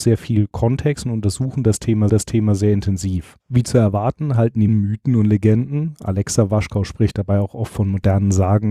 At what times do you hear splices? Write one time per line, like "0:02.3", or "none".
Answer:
0:02.1
0:03.4
0:04.7